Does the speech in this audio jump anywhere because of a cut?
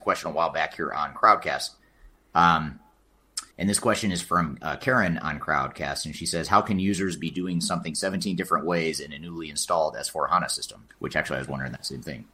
yes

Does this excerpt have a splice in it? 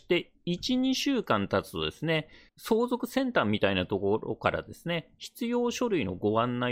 no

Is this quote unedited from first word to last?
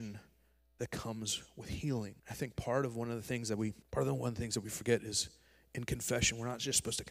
no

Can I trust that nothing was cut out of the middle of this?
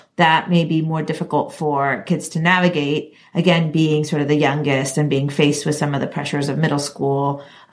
yes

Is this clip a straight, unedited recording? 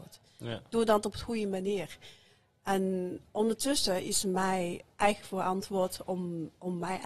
yes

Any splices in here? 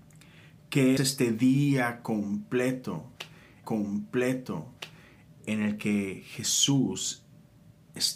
yes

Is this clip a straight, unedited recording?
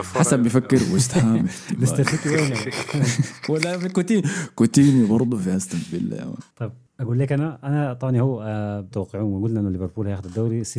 no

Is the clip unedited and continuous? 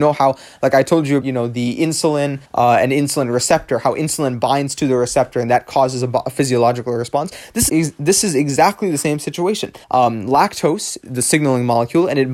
no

